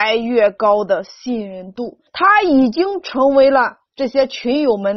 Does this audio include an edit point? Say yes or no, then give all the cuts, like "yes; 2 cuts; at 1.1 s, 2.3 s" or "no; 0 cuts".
yes; 1 cut; at 2.1 s